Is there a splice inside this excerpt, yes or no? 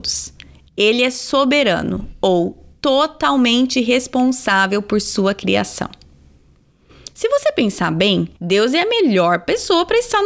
yes